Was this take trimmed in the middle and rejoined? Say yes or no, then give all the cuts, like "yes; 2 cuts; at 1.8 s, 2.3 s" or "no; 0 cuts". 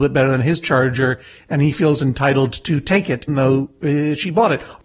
yes; 1 cut; at 3.3 s